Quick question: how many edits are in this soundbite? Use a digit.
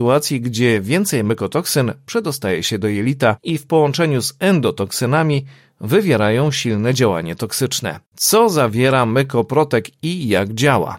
1